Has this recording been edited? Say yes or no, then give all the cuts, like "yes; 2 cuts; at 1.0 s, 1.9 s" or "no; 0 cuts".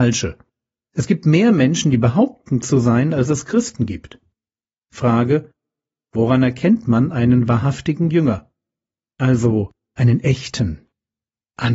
yes; 1 cut; at 2.6 s